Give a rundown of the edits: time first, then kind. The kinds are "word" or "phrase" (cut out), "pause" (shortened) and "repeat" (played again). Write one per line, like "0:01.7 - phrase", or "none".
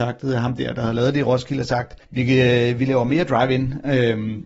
0:02.0 - pause

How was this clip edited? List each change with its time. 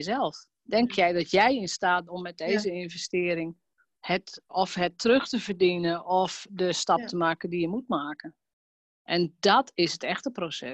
0:02.1 - word
0:04.5 - word

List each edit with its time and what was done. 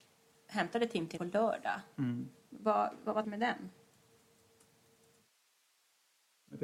0:01.2 - word
0:03.2 - word

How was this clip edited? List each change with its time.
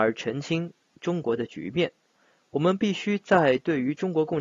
none

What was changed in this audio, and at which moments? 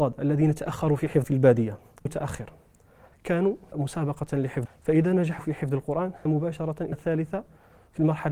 0:01.2 - word
0:02.1 - word
0:03.7 - word
0:04.7 - word
0:05.4 - word
0:06.3 - word
0:06.9 - word

